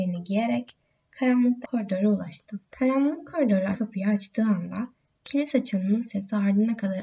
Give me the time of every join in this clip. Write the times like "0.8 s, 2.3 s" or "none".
1.6 s, 2.6 s, 3.7 s

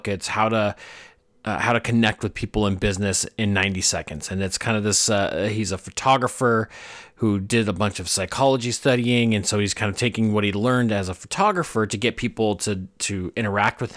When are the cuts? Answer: none

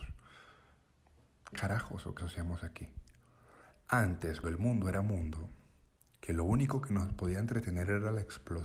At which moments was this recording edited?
1.5 s, 2.2 s, 4.4 s

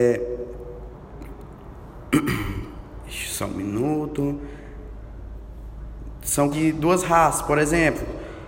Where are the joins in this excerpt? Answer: 6.5 s

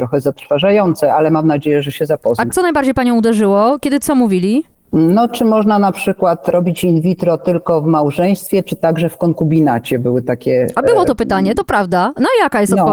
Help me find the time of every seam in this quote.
none

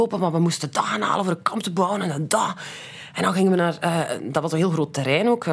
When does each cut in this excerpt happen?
none

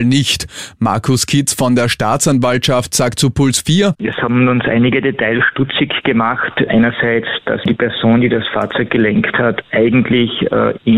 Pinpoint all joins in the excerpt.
7.6 s

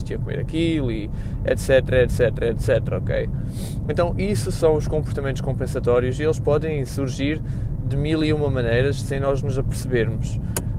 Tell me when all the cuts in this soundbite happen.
none

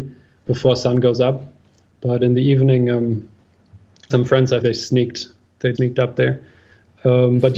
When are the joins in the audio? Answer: 4.1 s, 4.6 s, 5.8 s

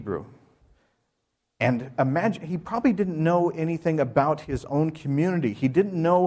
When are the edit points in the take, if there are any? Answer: none

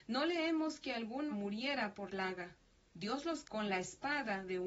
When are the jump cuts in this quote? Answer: 1.3 s, 2.1 s, 3.4 s

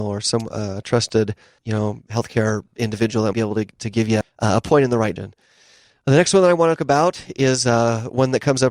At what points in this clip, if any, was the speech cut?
1.6 s, 3.3 s, 4.2 s, 5.2 s, 6.8 s

